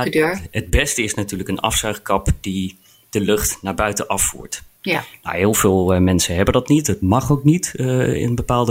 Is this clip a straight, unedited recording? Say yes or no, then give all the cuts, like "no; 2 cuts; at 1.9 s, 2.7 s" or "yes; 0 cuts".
yes; 0 cuts